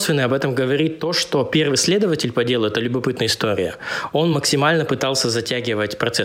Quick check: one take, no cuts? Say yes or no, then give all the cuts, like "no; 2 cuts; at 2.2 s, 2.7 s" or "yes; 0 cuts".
yes; 0 cuts